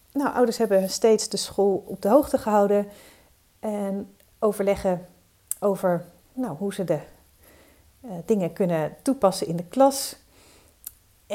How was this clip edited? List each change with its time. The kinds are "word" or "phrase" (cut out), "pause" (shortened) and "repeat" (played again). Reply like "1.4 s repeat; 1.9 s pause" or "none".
6.2 s pause